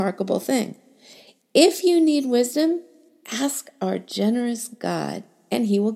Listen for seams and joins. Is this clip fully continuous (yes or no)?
yes